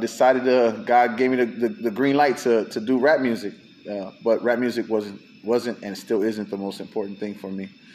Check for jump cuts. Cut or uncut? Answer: uncut